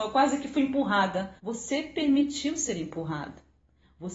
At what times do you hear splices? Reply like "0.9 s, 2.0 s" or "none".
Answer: 1.4 s